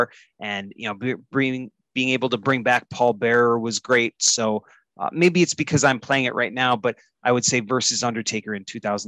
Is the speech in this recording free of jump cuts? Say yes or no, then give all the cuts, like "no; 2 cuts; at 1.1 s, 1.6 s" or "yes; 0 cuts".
yes; 0 cuts